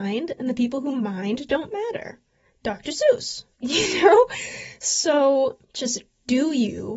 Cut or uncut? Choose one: cut